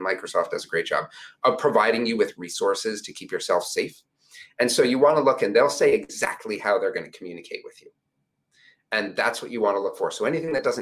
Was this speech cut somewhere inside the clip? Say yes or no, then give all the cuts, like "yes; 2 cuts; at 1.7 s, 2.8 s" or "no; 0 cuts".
no; 0 cuts